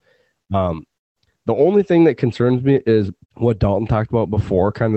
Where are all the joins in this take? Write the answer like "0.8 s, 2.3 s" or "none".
3.2 s